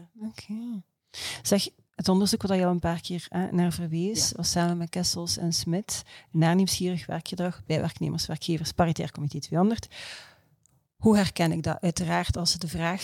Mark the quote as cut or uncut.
uncut